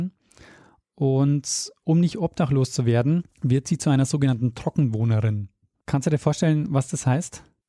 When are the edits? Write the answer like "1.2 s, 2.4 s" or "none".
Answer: 3.3 s